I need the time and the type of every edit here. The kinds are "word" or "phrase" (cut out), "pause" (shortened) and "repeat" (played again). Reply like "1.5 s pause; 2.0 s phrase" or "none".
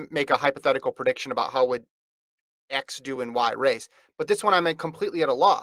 none